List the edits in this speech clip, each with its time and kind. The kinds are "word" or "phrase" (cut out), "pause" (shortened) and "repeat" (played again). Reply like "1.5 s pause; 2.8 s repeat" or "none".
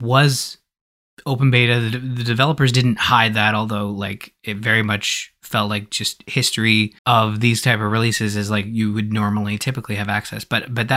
7.0 s pause